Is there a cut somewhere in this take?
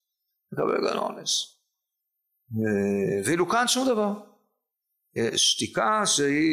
no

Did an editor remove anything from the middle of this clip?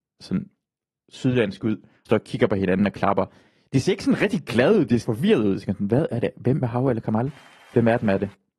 yes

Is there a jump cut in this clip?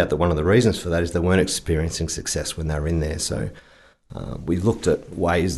no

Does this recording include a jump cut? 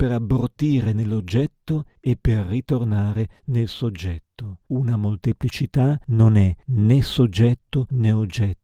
no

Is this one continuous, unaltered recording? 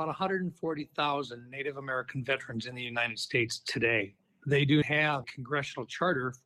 no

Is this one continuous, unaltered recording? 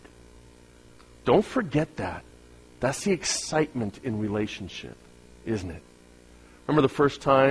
yes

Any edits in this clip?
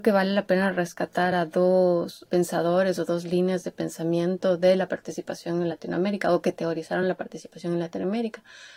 no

